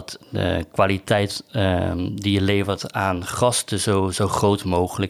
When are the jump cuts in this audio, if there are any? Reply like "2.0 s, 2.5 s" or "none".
none